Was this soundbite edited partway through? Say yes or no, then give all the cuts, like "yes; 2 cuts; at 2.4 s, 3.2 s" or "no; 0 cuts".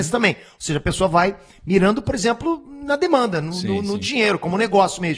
no; 0 cuts